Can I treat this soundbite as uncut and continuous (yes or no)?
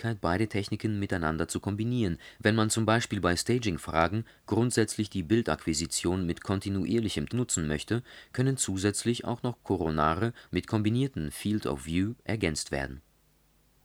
no